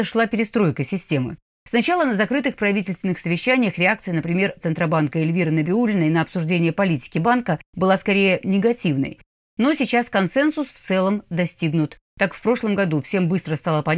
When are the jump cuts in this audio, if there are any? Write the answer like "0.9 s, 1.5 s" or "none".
4.6 s

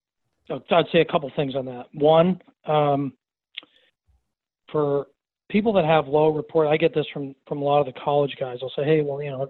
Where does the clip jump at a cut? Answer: none

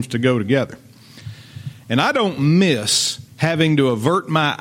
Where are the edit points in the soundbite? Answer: 3.3 s

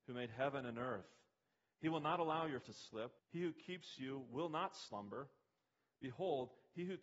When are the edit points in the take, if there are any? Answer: 2.6 s, 3.2 s

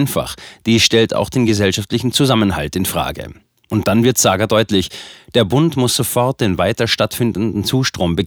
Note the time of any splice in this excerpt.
none

